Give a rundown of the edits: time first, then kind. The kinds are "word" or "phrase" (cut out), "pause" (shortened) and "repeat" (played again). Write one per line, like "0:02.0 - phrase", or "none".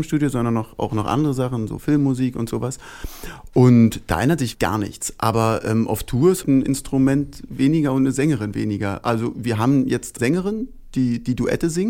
0:04.5 - word
0:06.4 - word
0:10.2 - phrase